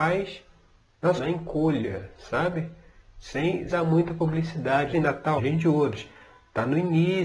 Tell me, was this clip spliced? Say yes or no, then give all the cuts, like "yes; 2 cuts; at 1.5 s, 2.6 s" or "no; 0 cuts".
yes; 4 cuts; at 1.2 s, 3.7 s, 4.9 s, 5.4 s